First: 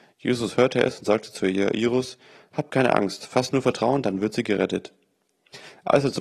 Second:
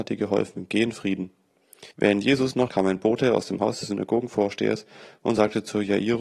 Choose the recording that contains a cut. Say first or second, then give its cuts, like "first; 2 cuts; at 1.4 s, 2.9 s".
second; 2 cuts; at 1.9 s, 2.7 s